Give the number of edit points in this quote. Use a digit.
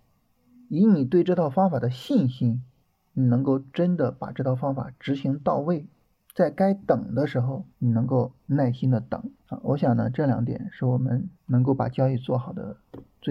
6